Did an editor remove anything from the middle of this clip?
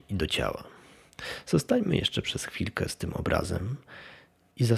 no; 0 cuts

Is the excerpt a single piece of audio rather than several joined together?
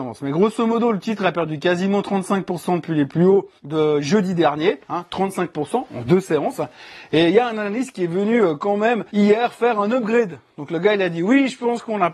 no; 2 cuts; at 3.6 s, 9.1 s

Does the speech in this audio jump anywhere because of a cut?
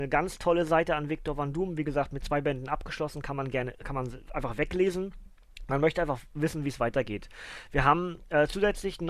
no; 0 cuts

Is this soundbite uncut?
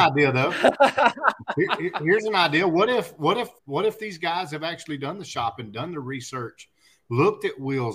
no; 1 cut; at 3.6 s

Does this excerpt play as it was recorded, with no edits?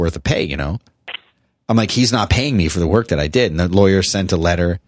yes; 0 cuts

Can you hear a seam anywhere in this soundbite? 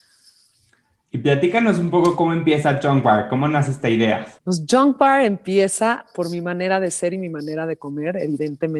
yes; 1 cut; at 4.4 s

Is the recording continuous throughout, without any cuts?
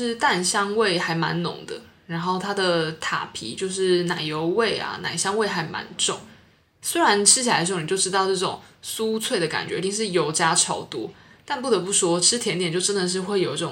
yes; 0 cuts

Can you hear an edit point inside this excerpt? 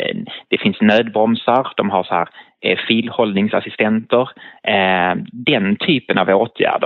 no; 0 cuts

